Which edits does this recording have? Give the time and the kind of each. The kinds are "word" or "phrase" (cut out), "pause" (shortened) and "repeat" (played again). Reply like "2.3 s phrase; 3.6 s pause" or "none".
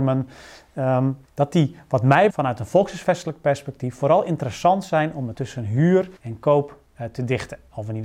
1.2 s word; 2.3 s word; 5.3 s word; 6.2 s pause